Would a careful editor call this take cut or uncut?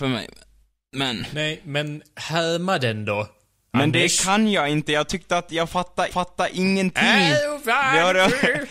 cut